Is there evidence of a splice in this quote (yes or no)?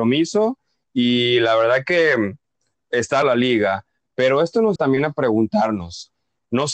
yes